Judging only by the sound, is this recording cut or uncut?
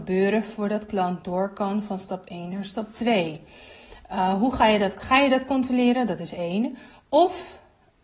uncut